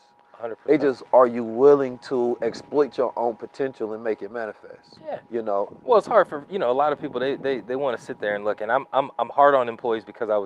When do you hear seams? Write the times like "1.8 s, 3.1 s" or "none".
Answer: 5.3 s